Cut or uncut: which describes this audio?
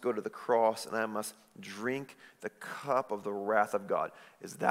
uncut